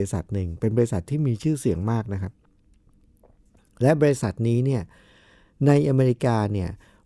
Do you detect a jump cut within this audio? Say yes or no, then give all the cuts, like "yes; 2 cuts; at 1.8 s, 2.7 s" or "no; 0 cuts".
no; 0 cuts